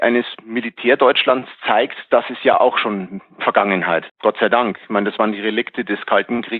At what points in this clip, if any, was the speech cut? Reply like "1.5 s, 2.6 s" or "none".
4.1 s